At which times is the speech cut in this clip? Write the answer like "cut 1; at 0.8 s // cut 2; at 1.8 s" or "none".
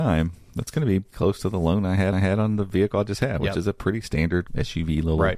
cut 1; at 1.1 s // cut 2; at 2.1 s // cut 3; at 4.5 s